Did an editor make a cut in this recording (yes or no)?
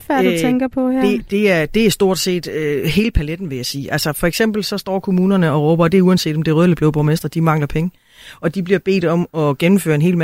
yes